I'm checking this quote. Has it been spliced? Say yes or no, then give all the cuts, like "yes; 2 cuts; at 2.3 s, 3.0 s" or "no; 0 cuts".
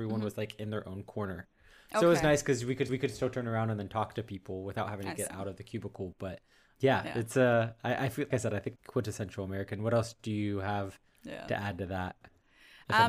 yes; 3 cuts; at 2.9 s, 8.3 s, 8.8 s